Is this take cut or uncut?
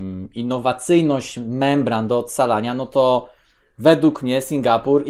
uncut